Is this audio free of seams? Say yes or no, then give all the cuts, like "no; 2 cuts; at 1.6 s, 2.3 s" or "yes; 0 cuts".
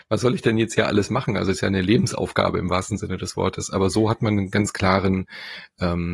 yes; 0 cuts